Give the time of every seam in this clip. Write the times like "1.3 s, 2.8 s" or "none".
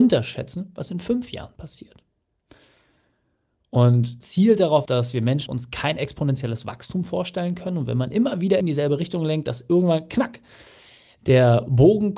4.2 s, 4.9 s, 5.5 s, 8.6 s